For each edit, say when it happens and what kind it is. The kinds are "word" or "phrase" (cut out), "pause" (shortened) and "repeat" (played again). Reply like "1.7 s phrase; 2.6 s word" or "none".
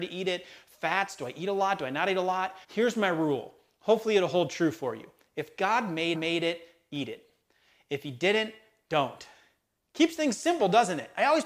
2.6 s pause; 6.1 s repeat